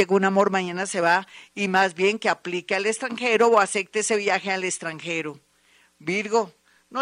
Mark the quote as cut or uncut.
uncut